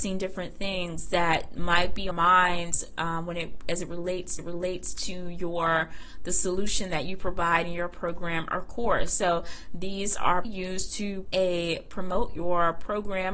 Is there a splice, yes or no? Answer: yes